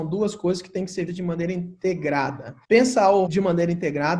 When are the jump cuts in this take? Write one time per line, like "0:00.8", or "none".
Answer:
0:01.1
0:02.6
0:03.3